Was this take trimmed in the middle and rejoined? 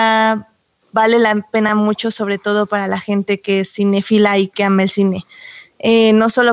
no; 0 cuts

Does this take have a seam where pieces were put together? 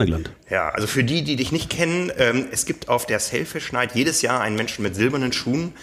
no; 0 cuts

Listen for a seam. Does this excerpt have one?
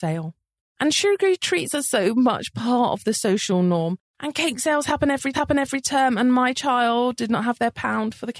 yes; 2 cuts; at 0.9 s, 5.3 s

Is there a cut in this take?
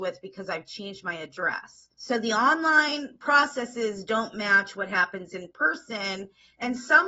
yes; 1 cut; at 1.9 s

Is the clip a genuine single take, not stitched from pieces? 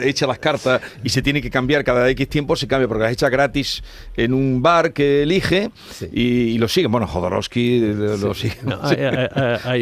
yes; 0 cuts

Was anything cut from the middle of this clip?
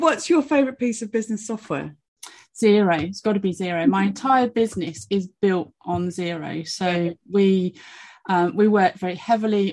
no; 0 cuts

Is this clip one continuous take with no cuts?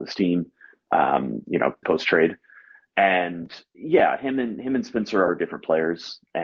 no; 2 cuts; at 1.8 s, 3.7 s

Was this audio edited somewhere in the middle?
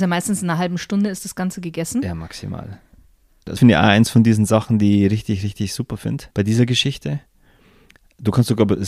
yes; 2 cuts; at 3.6 s, 6.3 s

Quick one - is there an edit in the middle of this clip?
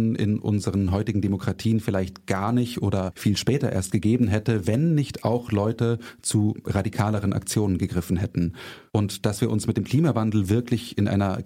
yes; 1 cut; at 8.9 s

